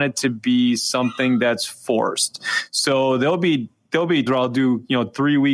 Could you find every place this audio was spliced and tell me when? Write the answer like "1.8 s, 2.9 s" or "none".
4.3 s